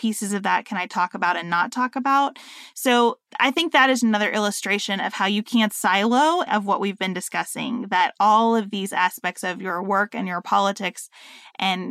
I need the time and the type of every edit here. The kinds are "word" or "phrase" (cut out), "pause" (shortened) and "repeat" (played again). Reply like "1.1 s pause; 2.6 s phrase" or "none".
3.3 s pause; 4.0 s word; 6.5 s word